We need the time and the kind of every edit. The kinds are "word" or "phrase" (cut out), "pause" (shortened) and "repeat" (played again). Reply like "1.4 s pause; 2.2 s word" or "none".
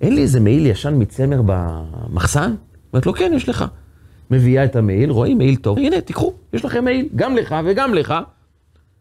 5.8 s word